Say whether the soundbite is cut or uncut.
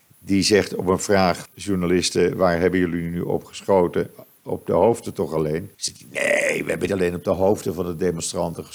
cut